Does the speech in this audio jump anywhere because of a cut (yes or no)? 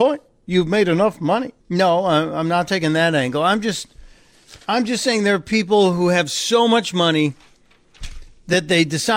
yes